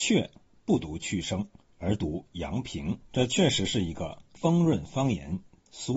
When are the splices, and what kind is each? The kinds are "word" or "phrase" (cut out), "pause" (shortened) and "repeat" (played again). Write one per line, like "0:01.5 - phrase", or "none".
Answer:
0:03.1 - pause